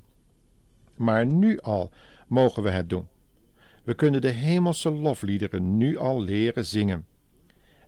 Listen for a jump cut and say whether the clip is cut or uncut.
uncut